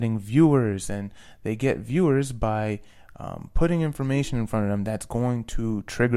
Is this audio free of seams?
yes; 0 cuts

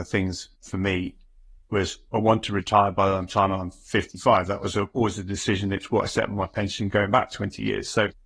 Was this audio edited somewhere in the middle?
no; 0 cuts

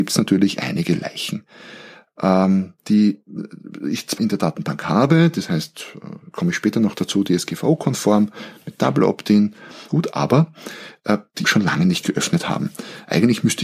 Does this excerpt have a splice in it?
yes; 3 cuts; at 4.2 s, 9.9 s, 11.4 s

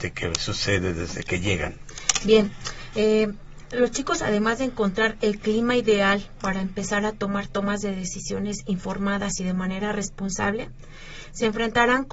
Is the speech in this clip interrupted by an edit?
no; 0 cuts

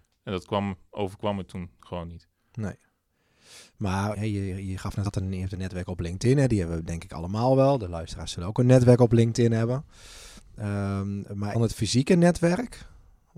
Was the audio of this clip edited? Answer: yes; 3 cuts; at 4.1 s, 5.1 s, 11.5 s

